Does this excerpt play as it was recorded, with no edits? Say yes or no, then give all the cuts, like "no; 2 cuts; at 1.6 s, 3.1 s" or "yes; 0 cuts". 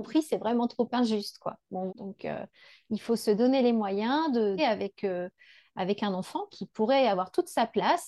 no; 3 cuts; at 1.9 s, 4.6 s, 6.5 s